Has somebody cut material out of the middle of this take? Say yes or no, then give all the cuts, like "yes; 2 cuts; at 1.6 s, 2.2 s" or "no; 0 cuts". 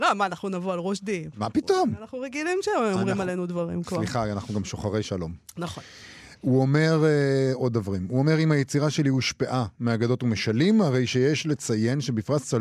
no; 0 cuts